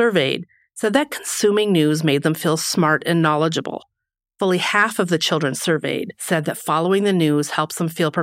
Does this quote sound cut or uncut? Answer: uncut